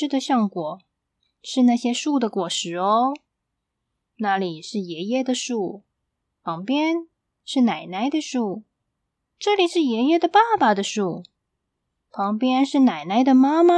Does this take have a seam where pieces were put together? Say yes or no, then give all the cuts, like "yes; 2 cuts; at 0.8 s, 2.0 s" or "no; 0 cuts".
no; 0 cuts